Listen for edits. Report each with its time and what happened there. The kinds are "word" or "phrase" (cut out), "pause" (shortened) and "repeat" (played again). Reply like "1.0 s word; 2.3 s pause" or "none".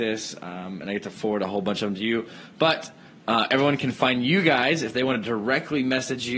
none